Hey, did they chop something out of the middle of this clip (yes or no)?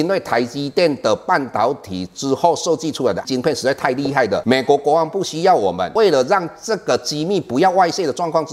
yes